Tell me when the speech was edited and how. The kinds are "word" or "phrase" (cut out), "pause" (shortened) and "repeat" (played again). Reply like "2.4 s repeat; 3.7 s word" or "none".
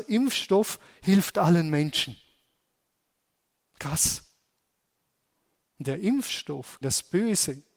6.8 s word